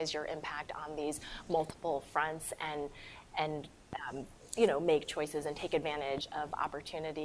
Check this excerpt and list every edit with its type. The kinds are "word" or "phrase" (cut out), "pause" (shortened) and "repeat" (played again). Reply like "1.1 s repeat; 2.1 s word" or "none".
none